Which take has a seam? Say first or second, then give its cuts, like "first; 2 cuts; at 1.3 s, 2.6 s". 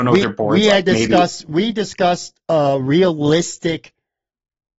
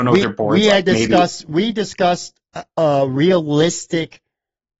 first; 1 cut; at 2.5 s